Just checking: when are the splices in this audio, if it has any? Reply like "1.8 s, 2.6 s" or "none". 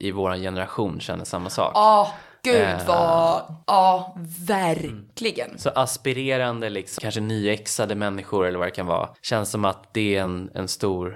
none